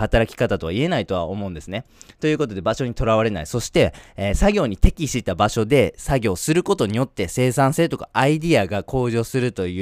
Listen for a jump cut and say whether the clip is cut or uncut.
uncut